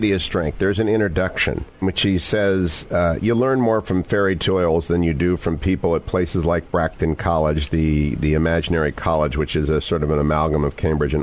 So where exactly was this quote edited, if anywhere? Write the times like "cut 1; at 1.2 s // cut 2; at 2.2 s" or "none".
cut 1; at 1.8 s